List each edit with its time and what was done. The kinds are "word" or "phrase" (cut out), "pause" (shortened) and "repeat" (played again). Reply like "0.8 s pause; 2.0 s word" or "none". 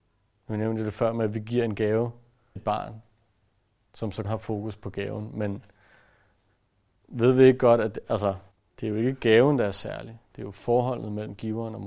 2.6 s word; 4.2 s word; 8.5 s pause